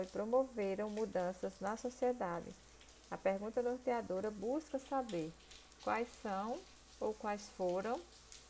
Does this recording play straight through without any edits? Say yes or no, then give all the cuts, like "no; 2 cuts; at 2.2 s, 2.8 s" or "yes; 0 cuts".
yes; 0 cuts